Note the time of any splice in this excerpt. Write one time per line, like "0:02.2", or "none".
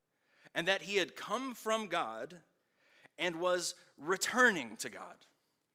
none